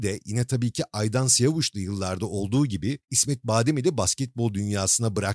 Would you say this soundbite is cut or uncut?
cut